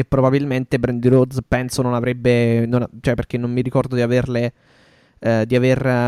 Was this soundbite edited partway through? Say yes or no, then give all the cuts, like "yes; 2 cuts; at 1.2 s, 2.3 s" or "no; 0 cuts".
no; 0 cuts